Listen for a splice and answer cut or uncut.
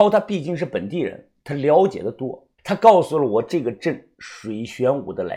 cut